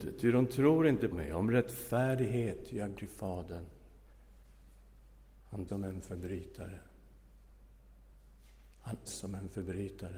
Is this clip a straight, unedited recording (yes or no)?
no